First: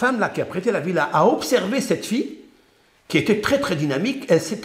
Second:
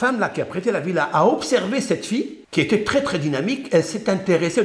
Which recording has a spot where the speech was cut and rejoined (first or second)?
second